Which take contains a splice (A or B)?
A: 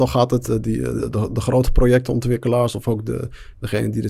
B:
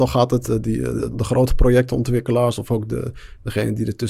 B